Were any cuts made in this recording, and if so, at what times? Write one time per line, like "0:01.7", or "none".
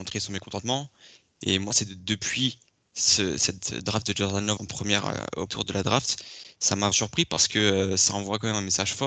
0:04.6
0:05.5
0:06.9